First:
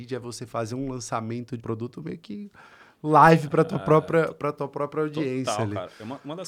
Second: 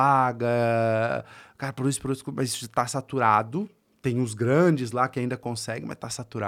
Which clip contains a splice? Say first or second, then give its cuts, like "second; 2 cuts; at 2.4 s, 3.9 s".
first; 1 cut; at 1.6 s